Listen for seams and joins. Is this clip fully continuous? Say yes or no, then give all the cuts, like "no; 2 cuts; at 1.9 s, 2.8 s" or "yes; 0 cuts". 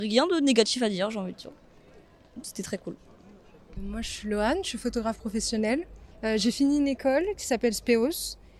no; 1 cut; at 6.1 s